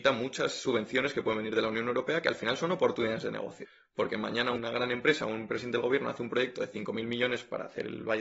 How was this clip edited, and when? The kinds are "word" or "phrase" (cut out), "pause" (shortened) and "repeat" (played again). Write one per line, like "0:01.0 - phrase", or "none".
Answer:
none